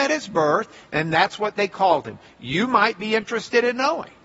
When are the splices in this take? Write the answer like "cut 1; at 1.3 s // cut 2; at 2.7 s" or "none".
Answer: none